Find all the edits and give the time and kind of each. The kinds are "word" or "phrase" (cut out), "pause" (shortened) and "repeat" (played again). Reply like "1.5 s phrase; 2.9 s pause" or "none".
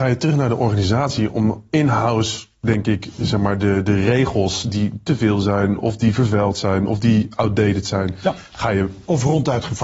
none